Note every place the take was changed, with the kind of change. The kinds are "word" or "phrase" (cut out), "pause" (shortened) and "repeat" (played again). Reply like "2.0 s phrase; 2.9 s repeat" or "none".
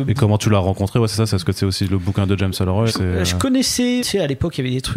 2.9 s word; 4.0 s word